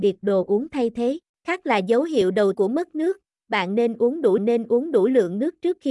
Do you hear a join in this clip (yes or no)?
yes